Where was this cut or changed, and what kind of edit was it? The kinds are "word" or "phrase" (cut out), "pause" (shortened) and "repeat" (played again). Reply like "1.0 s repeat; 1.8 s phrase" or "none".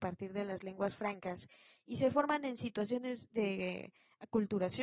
none